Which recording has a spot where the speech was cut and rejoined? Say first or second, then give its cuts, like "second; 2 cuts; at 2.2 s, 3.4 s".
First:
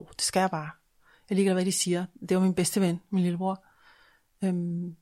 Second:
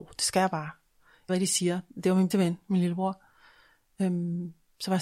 second; 2 cuts; at 1.3 s, 2.3 s